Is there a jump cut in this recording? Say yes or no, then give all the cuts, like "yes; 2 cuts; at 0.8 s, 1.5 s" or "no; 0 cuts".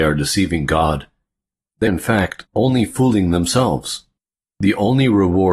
yes; 3 cuts; at 1.9 s, 2.5 s, 4.2 s